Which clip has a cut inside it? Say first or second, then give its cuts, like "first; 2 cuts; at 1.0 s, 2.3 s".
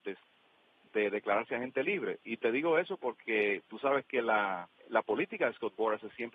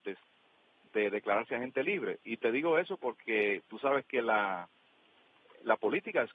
first; 1 cut; at 4.8 s